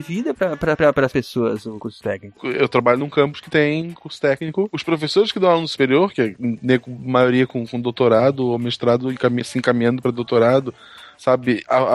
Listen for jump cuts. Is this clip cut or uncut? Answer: uncut